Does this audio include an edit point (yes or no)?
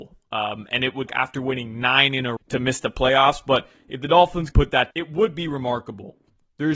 yes